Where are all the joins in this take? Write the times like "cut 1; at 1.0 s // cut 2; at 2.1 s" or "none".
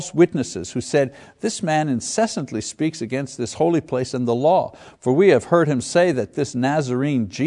none